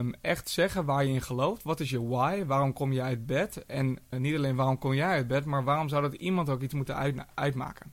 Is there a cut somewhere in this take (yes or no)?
yes